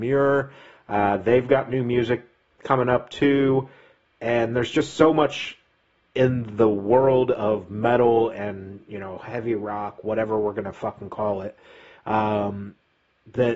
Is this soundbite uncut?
yes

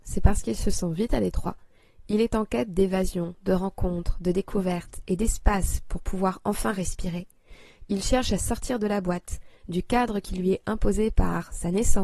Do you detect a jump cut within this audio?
no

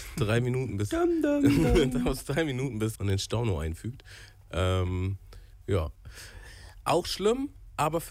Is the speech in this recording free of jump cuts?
no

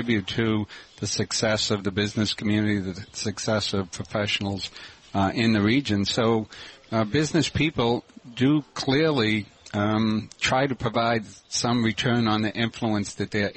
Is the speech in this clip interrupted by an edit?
yes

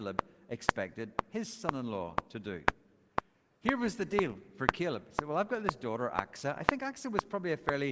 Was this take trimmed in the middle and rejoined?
no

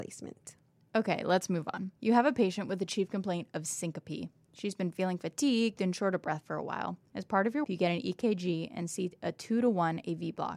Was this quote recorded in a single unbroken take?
no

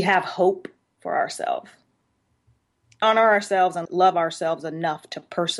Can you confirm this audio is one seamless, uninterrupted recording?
no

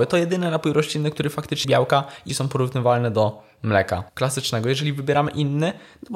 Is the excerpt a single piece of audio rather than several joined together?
no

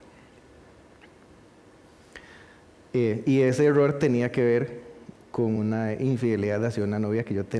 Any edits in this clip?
no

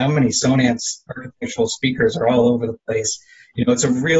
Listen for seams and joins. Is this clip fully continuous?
yes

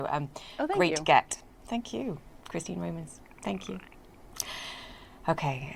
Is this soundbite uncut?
yes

